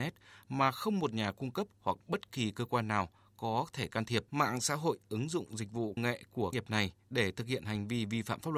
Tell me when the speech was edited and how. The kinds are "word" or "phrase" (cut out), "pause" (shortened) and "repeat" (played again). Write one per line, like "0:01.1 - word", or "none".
0:04.3 - pause
0:06.0 - word
0:06.5 - phrase